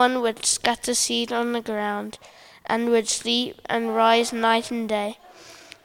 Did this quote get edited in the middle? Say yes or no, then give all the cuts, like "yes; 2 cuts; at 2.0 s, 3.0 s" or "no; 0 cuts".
no; 0 cuts